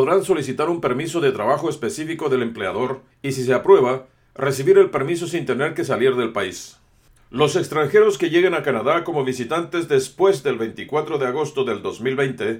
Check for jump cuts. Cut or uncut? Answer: uncut